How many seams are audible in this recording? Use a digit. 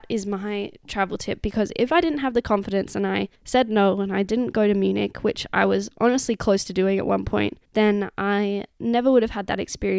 2